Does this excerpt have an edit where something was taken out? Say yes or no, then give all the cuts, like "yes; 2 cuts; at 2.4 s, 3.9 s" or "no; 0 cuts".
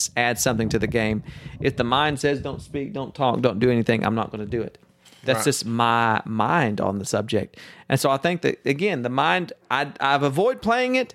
no; 0 cuts